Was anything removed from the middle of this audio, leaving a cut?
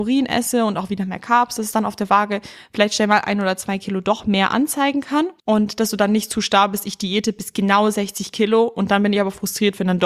yes; 1 cut; at 5.4 s

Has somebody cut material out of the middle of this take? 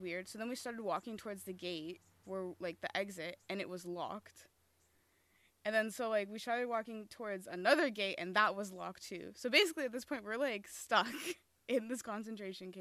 yes; 1 cut; at 2.2 s

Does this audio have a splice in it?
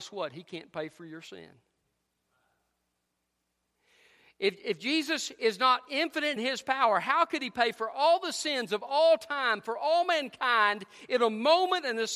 yes; 1 cut; at 6.4 s

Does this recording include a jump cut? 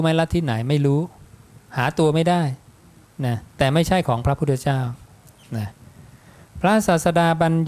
yes; 1 cut; at 3.5 s

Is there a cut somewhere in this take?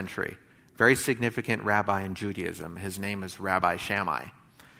no; 0 cuts

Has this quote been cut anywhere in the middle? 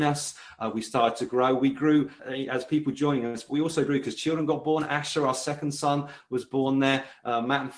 yes; 1 cut; at 2.2 s

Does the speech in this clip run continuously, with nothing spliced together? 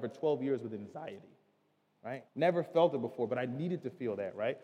no; 1 cut; at 2.3 s

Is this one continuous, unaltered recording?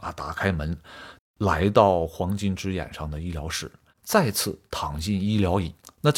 no; 1 cut; at 1.2 s

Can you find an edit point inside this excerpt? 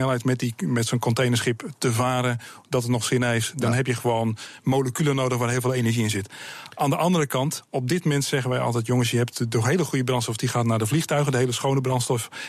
no; 0 cuts

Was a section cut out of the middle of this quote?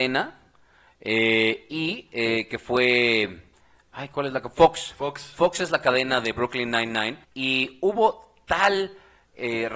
yes; 1 cut; at 7.2 s

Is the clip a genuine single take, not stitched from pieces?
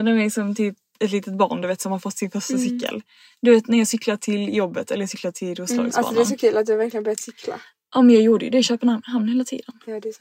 yes; 0 cuts

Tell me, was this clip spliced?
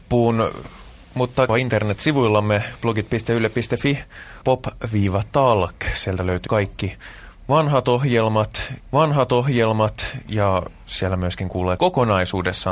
yes; 5 cuts; at 1.5 s, 4.4 s, 6.5 s, 8.8 s, 11.8 s

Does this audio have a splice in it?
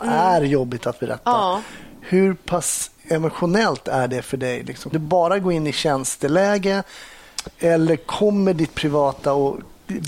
yes; 2 cuts; at 3.0 s, 4.9 s

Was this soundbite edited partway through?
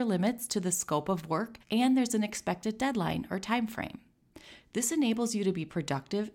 yes; 1 cut; at 1.6 s

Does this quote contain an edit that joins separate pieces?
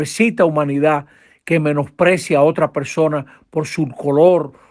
no; 0 cuts

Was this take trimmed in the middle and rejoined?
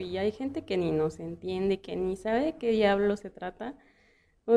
no; 0 cuts

